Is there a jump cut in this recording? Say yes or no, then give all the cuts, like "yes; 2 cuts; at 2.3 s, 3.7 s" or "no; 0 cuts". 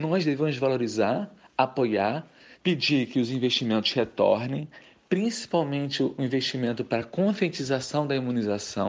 no; 0 cuts